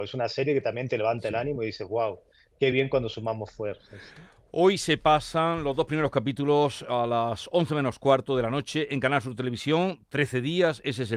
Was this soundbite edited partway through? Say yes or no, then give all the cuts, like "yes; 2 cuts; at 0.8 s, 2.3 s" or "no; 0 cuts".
no; 0 cuts